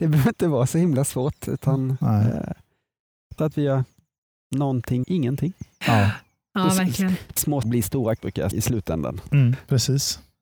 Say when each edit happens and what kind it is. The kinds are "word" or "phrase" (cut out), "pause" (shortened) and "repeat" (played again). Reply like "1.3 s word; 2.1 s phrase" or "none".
3.4 s word; 5.0 s word; 7.6 s word; 8.2 s word; 8.5 s word